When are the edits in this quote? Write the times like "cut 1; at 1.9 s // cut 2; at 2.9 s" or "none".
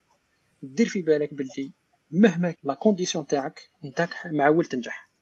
cut 1; at 2.5 s

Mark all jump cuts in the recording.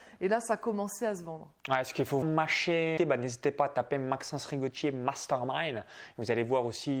cut 1; at 1.6 s // cut 2; at 2.2 s // cut 3; at 3.0 s

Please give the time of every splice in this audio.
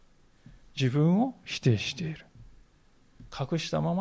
none

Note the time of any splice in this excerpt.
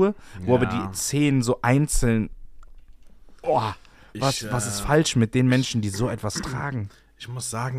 none

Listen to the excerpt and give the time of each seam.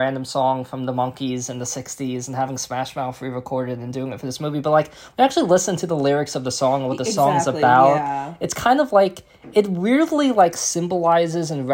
none

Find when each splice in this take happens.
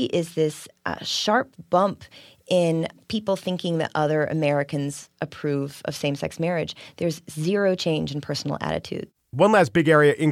none

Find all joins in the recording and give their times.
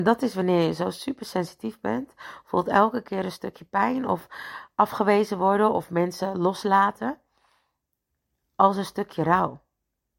none

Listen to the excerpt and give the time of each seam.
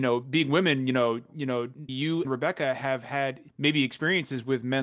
cut 1; at 1.9 s // cut 2; at 2.2 s // cut 3; at 3.5 s

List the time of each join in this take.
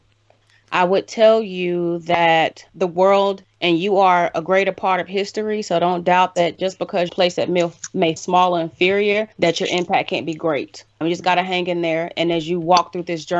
cut 1; at 2.7 s // cut 2; at 3.4 s // cut 3; at 7.1 s // cut 4; at 8.2 s // cut 5; at 9.3 s // cut 6; at 11.0 s

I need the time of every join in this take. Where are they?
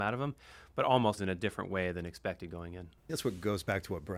cut 1; at 1.2 s // cut 2; at 3.1 s

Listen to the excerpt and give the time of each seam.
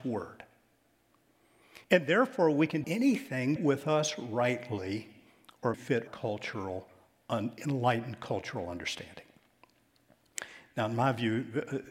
cut 1; at 1.8 s // cut 2; at 2.8 s // cut 3; at 3.6 s // cut 4; at 5.7 s // cut 5; at 6.1 s

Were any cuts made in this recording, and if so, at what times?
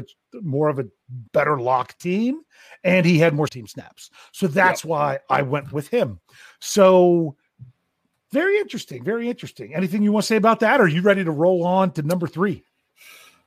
cut 1; at 1.3 s // cut 2; at 2.0 s // cut 3; at 3.5 s

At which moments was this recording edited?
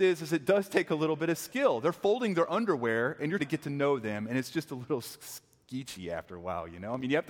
cut 1; at 3.4 s

